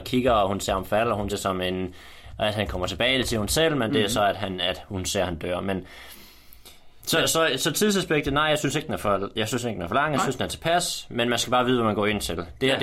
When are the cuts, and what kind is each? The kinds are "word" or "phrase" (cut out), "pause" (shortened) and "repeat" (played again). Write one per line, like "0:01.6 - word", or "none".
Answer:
0:01.3 - word
0:07.0 - word

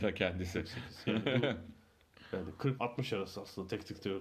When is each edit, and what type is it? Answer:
0:02.8 - word

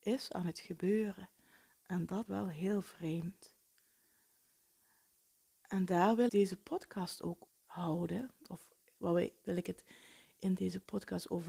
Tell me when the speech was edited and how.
0:02.3 - word
0:06.3 - word
0:07.5 - phrase

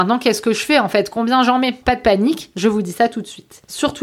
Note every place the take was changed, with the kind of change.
0:01.8 - word

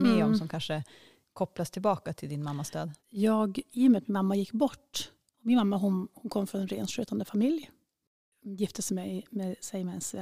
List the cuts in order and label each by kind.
0:03.0 - pause

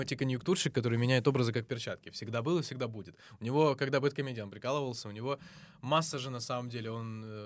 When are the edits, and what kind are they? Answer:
none

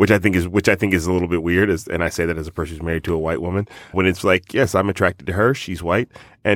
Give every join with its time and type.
0:03.9 - word

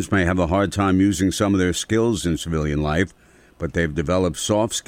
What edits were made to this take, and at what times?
none

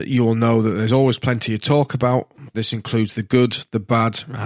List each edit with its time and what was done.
0:02.5 - word

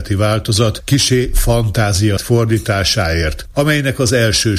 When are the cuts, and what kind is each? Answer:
0:02.2 - phrase

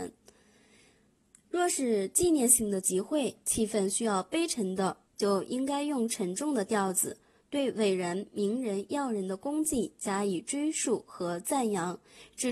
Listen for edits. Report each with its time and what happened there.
0:05.1 - pause

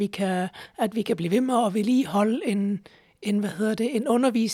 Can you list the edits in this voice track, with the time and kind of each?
none

